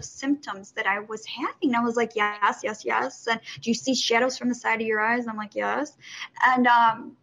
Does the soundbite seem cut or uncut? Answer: uncut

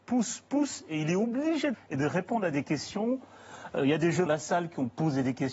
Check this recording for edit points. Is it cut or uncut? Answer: cut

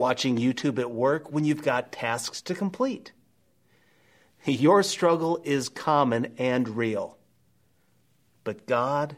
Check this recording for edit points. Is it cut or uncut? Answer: uncut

